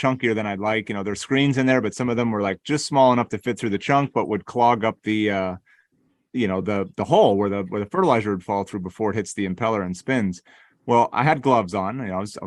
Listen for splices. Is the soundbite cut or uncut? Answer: uncut